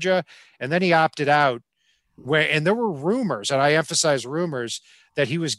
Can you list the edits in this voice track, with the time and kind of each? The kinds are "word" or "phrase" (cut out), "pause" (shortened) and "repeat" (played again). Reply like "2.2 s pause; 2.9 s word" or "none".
none

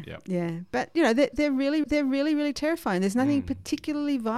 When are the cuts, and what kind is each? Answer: 1.8 s repeat

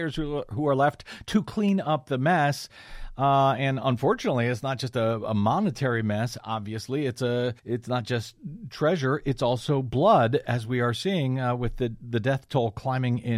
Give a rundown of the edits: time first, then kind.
7.6 s pause

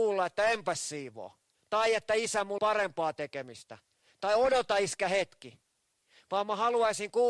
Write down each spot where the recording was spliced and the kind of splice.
2.6 s word

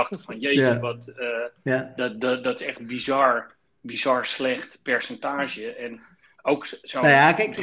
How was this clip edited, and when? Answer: none

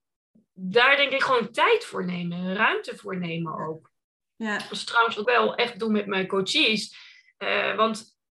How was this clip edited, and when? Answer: 5.2 s phrase

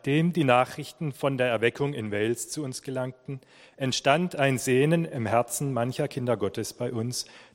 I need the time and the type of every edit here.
none

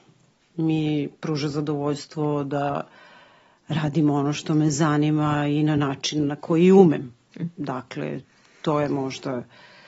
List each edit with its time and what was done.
none

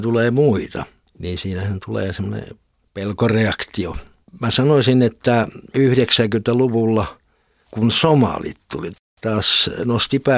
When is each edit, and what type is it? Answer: none

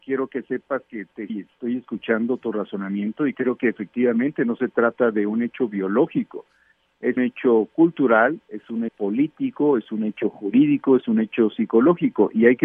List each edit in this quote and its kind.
1.3 s word; 7.2 s word; 8.9 s word

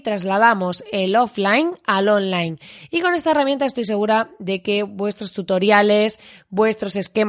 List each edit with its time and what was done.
none

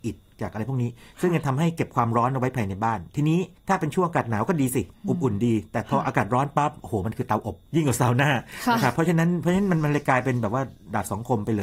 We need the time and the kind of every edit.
3.6 s pause; 7.7 s pause

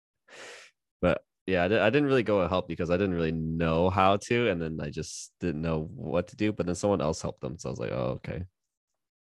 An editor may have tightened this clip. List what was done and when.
5.4 s pause

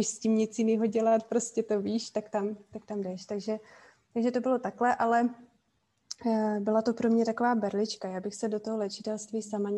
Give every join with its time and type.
none

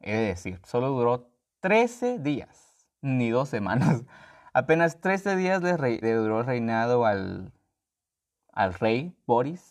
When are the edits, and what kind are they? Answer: 2.9 s pause; 6.0 s word

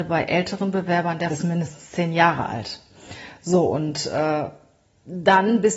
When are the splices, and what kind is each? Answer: 1.3 s phrase

